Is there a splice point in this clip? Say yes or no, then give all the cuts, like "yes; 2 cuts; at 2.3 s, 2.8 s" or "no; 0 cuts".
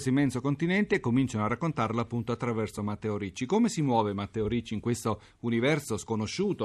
no; 0 cuts